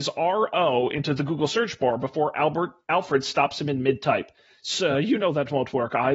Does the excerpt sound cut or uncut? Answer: uncut